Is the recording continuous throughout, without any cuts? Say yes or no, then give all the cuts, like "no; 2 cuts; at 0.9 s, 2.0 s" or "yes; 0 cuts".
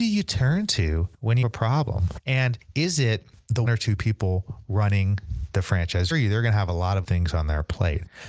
no; 4 cuts; at 1.4 s, 3.7 s, 6.1 s, 7.0 s